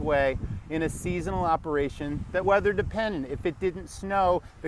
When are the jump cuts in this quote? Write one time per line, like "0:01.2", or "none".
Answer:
0:02.4